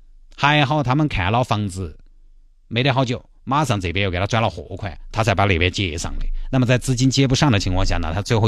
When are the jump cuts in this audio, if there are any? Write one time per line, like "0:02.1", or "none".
none